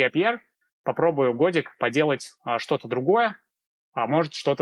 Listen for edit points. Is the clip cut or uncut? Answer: uncut